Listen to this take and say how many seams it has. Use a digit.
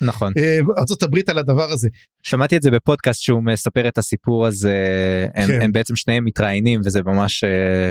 0